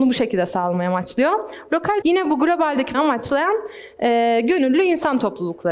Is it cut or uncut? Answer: cut